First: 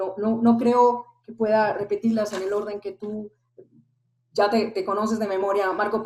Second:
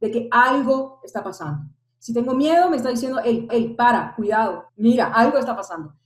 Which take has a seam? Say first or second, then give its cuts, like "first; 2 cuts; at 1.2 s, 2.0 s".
second; 2 cuts; at 3.5 s, 4.7 s